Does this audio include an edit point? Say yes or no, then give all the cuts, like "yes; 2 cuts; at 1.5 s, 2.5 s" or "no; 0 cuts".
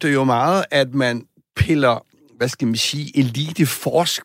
no; 0 cuts